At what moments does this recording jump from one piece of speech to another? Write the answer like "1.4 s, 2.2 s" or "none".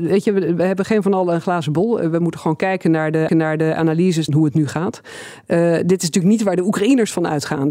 3.3 s, 4.3 s